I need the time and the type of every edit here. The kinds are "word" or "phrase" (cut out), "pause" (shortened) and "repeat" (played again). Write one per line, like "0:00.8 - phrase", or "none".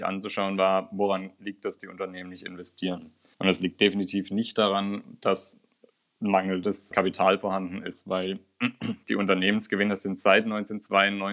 0:01.8 - word
0:03.3 - pause
0:06.9 - word